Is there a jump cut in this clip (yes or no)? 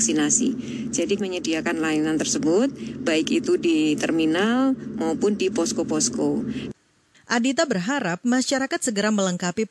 yes